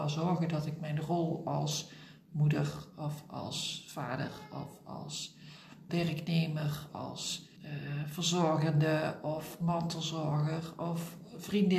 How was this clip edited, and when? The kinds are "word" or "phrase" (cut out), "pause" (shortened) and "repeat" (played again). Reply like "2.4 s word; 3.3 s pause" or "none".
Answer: 5.9 s word; 6.9 s word; 7.6 s pause